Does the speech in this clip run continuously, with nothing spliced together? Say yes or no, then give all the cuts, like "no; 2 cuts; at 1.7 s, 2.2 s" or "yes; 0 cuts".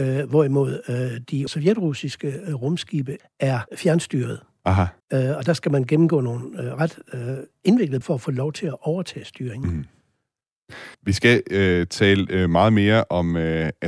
no; 6 cuts; at 1.5 s, 3.2 s, 3.7 s, 5.0 s, 8.0 s, 10.9 s